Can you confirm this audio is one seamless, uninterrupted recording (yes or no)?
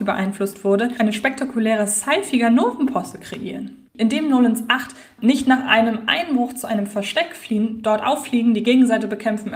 no